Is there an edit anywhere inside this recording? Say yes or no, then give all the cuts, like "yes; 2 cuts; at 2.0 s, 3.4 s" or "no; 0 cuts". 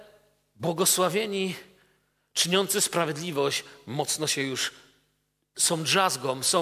no; 0 cuts